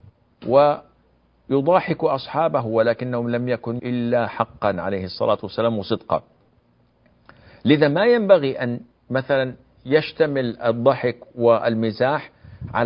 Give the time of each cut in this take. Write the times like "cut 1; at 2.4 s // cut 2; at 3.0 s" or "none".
cut 1; at 3.8 s